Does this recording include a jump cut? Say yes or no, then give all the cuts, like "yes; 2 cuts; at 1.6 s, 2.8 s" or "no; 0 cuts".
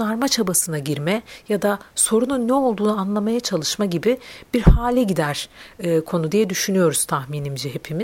no; 0 cuts